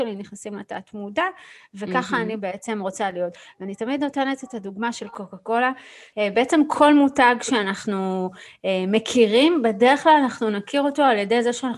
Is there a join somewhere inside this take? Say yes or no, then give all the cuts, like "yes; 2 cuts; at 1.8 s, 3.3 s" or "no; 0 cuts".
no; 0 cuts